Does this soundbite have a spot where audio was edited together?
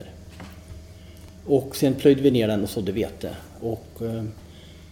no; 0 cuts

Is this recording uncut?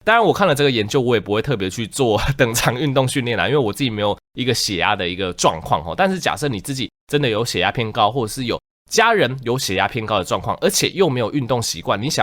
yes; 0 cuts

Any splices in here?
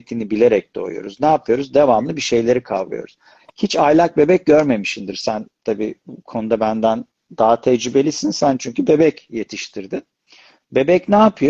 no; 0 cuts

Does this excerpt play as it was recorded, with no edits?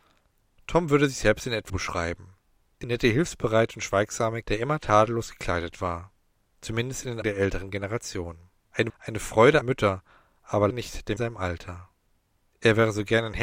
no; 8 cuts; at 1.7 s, 2.8 s, 4.4 s, 7.2 s, 8.9 s, 9.6 s, 10.7 s, 11.2 s

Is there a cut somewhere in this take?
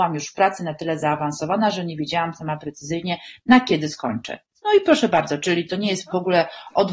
no; 0 cuts

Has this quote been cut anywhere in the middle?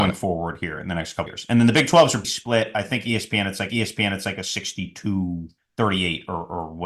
yes; 4 cuts; at 1.3 s, 2.2 s, 3.7 s, 5.6 s

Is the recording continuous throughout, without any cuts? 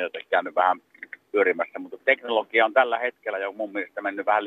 no; 1 cut; at 2.0 s

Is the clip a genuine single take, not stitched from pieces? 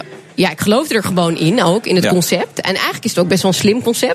yes; 0 cuts

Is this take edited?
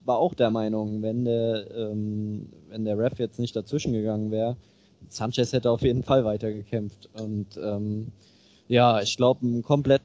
no; 0 cuts

